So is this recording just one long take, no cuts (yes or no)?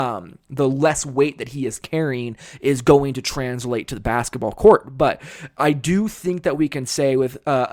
yes